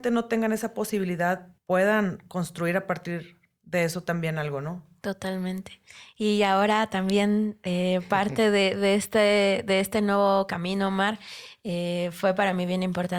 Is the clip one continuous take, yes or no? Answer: no